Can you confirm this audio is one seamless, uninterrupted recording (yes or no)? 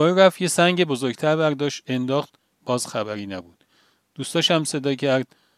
yes